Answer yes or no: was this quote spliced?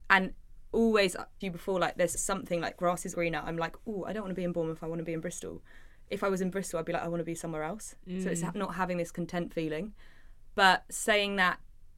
yes